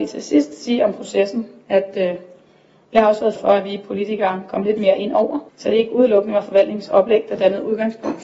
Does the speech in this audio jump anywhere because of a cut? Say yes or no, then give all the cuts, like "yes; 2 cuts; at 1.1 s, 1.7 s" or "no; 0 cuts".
yes; 2 cuts; at 3.4 s, 5.5 s